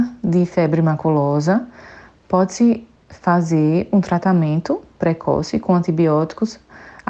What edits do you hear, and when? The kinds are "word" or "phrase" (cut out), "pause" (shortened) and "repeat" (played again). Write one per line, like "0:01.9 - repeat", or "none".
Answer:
none